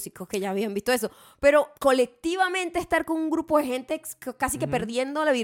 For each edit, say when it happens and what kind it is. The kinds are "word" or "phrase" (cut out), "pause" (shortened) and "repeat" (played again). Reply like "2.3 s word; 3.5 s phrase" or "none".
1.8 s pause